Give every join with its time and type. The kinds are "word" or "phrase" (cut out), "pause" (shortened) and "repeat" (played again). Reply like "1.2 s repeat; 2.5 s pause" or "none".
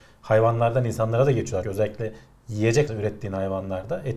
1.6 s word; 2.9 s word